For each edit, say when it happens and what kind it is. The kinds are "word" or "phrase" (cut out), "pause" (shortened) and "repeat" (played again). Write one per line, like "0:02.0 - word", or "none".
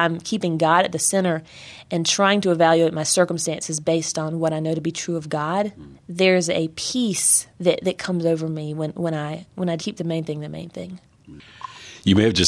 0:06.0 - pause
0:07.5 - pause
0:09.8 - word